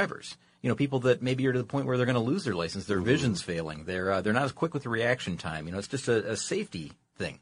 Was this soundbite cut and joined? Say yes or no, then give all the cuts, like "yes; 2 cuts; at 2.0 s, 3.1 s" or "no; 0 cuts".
no; 0 cuts